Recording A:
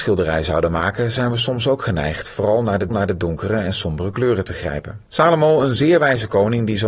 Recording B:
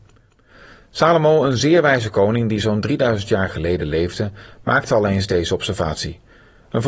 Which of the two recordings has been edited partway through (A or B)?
A